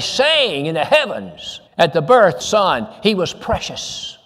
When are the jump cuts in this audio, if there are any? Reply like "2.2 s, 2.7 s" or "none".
1.7 s, 2.4 s